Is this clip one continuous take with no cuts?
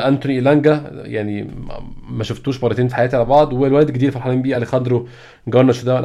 yes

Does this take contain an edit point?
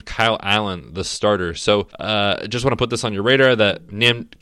yes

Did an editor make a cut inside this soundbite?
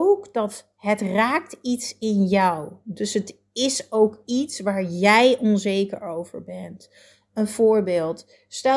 no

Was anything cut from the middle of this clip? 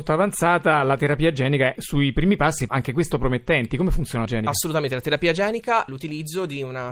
yes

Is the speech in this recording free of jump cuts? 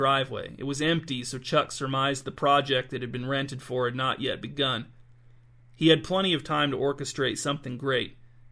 yes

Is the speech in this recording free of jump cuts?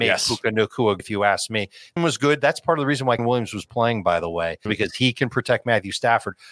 no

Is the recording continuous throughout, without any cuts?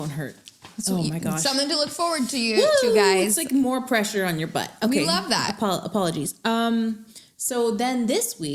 yes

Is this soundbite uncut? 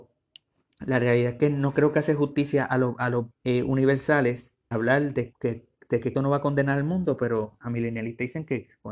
no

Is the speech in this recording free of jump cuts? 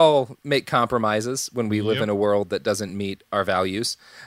yes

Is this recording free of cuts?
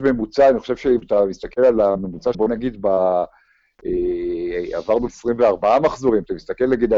no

